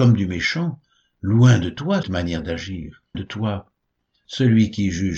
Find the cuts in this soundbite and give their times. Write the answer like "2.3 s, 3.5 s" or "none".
2.0 s, 3.1 s